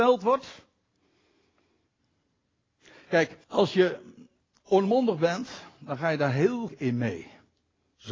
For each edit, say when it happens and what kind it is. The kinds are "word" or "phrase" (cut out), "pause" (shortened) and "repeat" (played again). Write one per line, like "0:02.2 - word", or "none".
0:03.4 - pause
0:06.7 - word